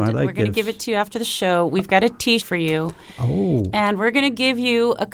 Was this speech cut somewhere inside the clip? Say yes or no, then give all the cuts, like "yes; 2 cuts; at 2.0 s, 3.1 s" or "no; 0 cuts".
yes; 1 cut; at 2.4 s